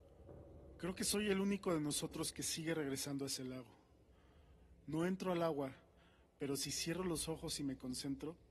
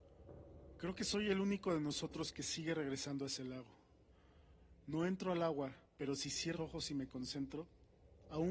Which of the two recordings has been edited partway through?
second; 2 cuts; at 5.9 s, 6.6 s

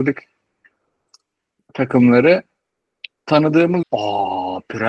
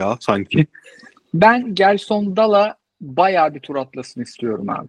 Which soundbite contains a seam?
first; 1 cut; at 3.8 s

